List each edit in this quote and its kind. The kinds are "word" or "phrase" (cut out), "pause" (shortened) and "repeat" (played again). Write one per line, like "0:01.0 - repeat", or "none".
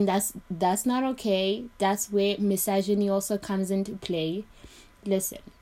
none